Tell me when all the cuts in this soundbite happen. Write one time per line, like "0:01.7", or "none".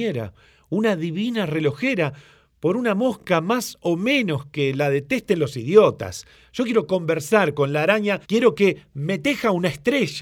0:08.2